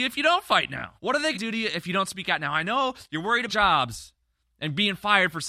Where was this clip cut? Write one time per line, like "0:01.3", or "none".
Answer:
0:01.0
0:01.3
0:03.5